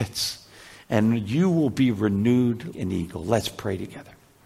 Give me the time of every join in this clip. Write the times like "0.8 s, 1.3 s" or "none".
2.7 s